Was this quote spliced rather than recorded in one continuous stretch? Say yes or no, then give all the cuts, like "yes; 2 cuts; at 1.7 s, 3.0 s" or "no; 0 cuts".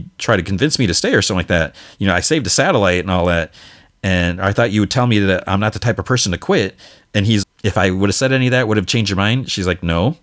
yes; 1 cut; at 7.4 s